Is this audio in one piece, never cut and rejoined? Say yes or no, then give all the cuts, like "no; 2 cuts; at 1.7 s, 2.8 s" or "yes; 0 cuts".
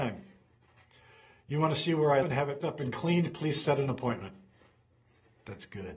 no; 2 cuts; at 2.2 s, 2.6 s